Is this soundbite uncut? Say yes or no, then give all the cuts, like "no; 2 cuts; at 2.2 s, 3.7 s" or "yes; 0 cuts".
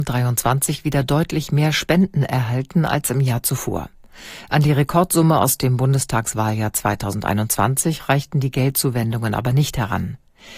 yes; 0 cuts